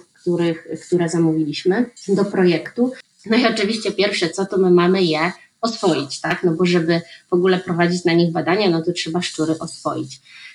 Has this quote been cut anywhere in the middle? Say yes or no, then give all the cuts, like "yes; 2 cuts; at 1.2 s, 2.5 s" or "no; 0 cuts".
yes; 1 cut; at 2.0 s